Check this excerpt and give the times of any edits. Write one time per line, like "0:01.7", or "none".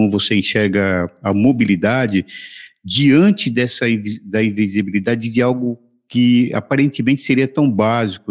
none